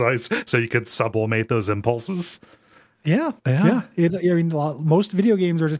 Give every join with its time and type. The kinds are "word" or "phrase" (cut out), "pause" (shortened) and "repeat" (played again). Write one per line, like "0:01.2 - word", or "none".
0:03.4 - pause
0:04.1 - word